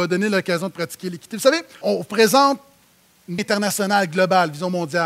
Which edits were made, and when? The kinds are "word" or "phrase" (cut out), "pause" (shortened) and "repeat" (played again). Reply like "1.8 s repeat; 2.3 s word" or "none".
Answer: 1.8 s word; 3.4 s word